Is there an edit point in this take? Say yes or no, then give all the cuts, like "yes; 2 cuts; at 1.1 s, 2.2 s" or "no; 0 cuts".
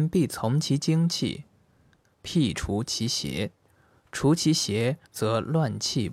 yes; 2 cuts; at 3.7 s, 5.1 s